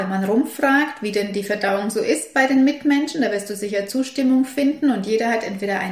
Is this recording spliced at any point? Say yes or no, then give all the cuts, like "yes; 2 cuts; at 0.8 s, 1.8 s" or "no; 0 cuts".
no; 0 cuts